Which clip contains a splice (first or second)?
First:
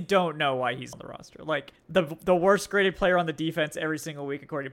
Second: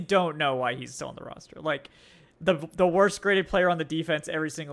first